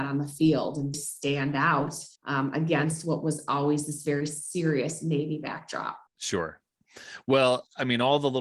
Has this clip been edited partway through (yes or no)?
yes